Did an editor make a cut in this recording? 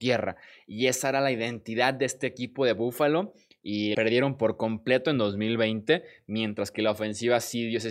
yes; 1 cut; at 3.9 s

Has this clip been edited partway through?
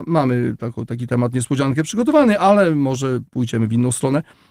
yes; 1 cut; at 3.3 s

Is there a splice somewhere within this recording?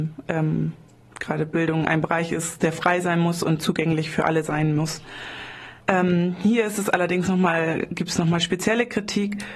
yes; 1 cut; at 5.8 s

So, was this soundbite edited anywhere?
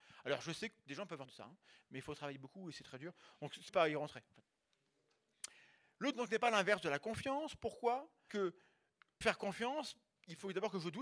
yes; 5 cuts; at 1.2 s, 3.7 s, 6.1 s, 8.3 s, 9.2 s

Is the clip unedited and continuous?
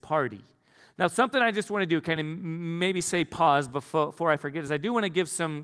yes; 0 cuts

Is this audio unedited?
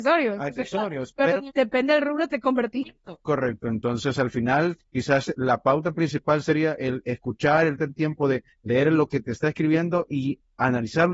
no; 4 cuts; at 1.5 s, 2.8 s, 4.9 s, 7.8 s

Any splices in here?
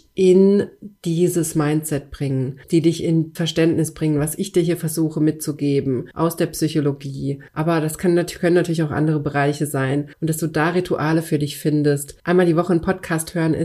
yes; 6 cuts; at 2.6 s, 3.4 s, 6.1 s, 7.5 s, 10.1 s, 12.2 s

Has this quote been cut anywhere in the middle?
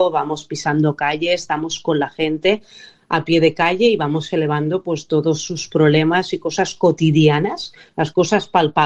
no; 0 cuts

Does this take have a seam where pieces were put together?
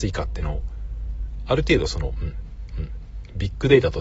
yes; 1 cut; at 2.7 s

